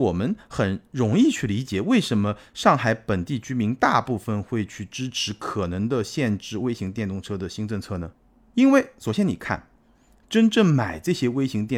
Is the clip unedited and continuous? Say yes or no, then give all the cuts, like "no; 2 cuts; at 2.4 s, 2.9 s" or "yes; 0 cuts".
yes; 0 cuts